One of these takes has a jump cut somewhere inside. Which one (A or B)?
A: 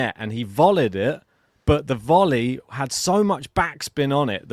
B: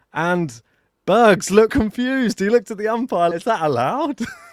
B